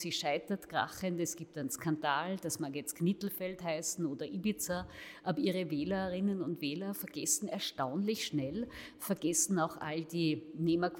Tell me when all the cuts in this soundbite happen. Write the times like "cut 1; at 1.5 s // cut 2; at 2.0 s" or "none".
none